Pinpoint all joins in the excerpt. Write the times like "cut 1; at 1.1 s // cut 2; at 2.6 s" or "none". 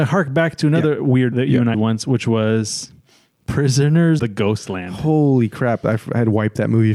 cut 1; at 1.3 s // cut 2; at 1.7 s // cut 3; at 4.2 s